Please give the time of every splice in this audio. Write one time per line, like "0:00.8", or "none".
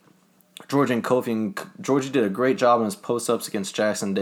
none